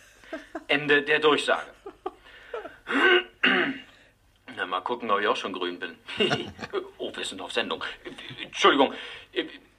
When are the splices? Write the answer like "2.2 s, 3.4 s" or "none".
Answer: none